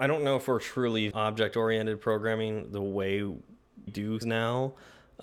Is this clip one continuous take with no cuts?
no; 3 cuts; at 1.1 s, 3.9 s, 4.2 s

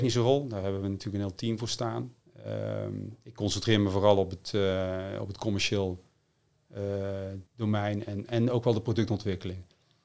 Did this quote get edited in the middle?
yes; 1 cut; at 7.5 s

